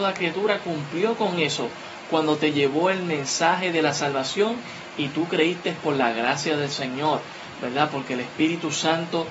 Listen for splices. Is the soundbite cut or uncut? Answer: uncut